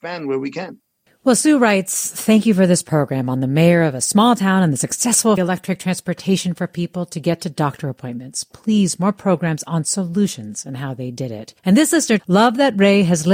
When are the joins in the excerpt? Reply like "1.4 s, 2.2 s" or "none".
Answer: 1.1 s, 5.4 s, 11.6 s, 12.2 s